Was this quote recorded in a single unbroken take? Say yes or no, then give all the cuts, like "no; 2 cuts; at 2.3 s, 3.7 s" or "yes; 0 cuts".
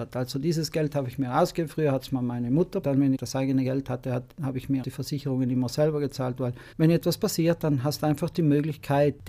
no; 4 cuts; at 2.8 s, 3.1 s, 4.8 s, 6.7 s